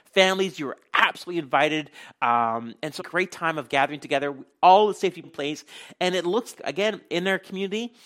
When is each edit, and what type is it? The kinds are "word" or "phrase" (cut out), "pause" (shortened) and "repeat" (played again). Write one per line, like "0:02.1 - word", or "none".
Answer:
0:03.0 - phrase
0:05.2 - phrase
0:06.6 - word